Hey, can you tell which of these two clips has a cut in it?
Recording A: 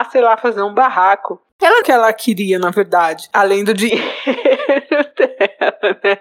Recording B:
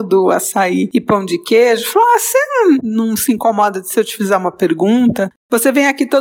A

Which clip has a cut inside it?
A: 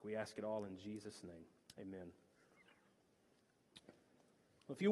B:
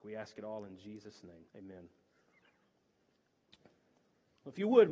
B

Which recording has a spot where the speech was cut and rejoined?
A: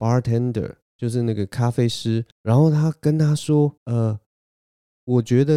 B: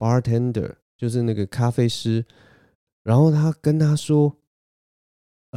A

